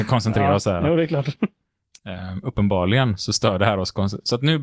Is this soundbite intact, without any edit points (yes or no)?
yes